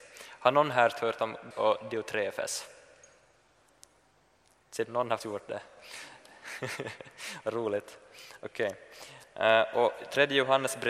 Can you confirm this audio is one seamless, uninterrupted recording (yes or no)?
no